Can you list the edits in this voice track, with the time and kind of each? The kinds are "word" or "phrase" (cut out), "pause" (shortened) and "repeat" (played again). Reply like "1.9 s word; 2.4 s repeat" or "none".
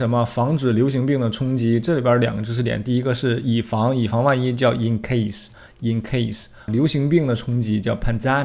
none